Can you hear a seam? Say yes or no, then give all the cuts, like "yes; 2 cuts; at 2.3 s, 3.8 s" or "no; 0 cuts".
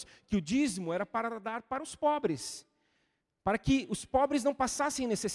no; 0 cuts